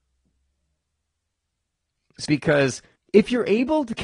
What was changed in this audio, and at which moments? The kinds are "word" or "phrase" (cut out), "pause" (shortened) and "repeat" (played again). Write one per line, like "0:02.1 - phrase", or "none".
0:02.2 - phrase
0:03.0 - pause